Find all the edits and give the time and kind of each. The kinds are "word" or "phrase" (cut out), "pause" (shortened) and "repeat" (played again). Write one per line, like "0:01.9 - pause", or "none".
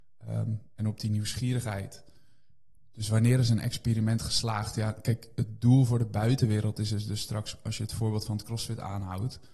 none